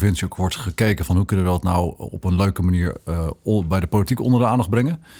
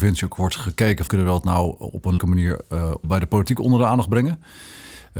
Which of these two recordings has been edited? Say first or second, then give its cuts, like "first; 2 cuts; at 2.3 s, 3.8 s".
second; 3 cuts; at 1.1 s, 2.2 s, 3.0 s